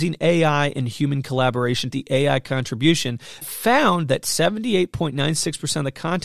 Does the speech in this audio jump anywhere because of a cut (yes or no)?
yes